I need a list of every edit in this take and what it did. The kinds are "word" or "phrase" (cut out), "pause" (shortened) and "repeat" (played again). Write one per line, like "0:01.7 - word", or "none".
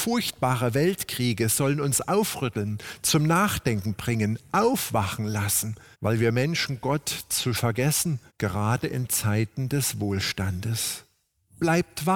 0:05.9 - pause
0:07.5 - word
0:08.3 - pause